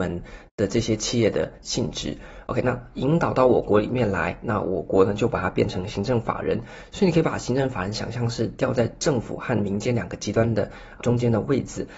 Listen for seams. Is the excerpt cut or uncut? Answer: cut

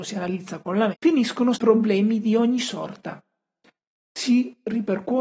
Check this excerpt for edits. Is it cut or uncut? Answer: cut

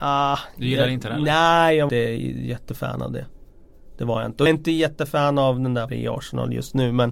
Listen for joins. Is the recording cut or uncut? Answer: cut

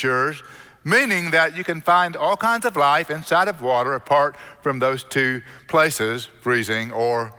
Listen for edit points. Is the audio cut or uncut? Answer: uncut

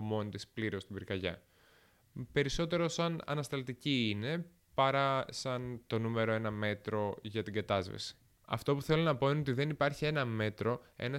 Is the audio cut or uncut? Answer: cut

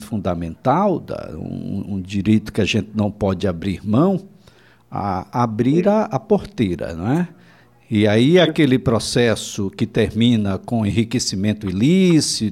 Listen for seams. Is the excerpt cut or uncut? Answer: uncut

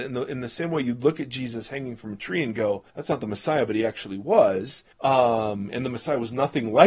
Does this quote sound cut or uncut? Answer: cut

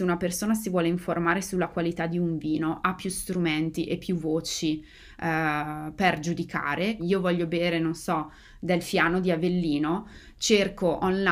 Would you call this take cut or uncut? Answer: cut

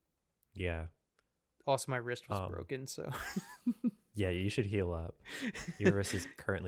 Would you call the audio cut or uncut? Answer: uncut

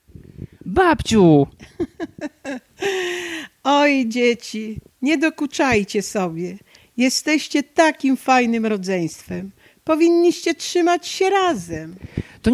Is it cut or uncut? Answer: cut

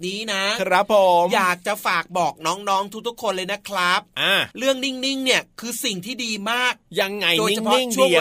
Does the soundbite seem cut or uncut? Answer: cut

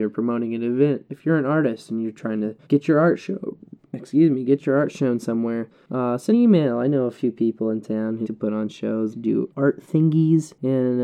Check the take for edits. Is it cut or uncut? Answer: cut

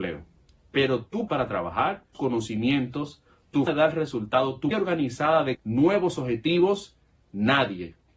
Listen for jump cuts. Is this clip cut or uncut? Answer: cut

